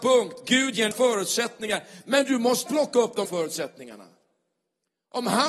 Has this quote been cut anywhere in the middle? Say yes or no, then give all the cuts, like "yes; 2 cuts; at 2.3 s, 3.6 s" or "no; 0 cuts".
yes; 3 cuts; at 0.9 s, 2.7 s, 3.3 s